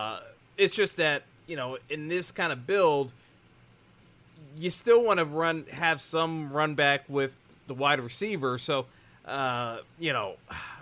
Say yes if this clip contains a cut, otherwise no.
no